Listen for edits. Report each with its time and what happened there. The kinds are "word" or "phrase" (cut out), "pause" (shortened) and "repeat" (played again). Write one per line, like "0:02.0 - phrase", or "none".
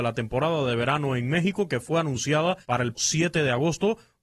0:02.6 - pause
0:02.9 - word